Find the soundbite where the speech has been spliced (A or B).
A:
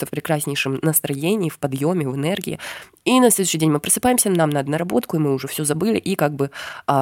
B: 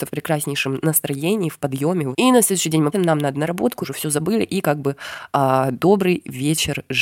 B